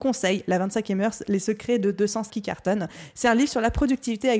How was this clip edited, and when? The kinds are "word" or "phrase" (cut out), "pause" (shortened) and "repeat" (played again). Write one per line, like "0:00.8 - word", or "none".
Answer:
0:02.3 - word